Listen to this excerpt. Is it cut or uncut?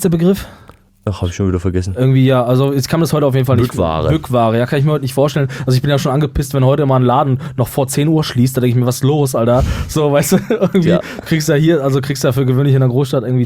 uncut